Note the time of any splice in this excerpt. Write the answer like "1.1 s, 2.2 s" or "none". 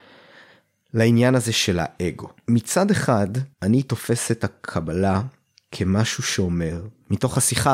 2.4 s, 3.5 s